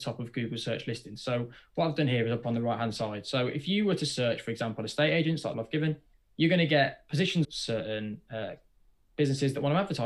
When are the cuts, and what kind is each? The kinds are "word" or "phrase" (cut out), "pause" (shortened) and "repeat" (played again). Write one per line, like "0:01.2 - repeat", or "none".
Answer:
0:02.4 - phrase
0:05.5 - phrase
0:06.1 - pause
0:07.4 - phrase